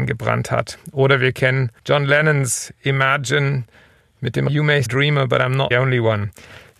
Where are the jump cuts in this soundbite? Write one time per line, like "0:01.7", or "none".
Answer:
0:01.8
0:04.5
0:04.9
0:05.7